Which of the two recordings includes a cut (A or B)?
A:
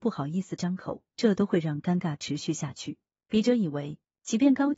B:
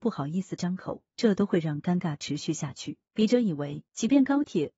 B